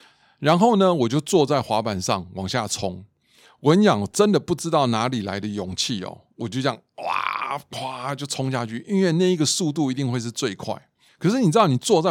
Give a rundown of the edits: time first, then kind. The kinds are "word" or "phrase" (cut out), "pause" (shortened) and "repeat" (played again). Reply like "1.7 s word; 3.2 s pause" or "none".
6.3 s pause; 11.1 s pause